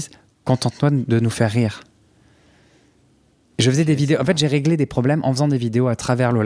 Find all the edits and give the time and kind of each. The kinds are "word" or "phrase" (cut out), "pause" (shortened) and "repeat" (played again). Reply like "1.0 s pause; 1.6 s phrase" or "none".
none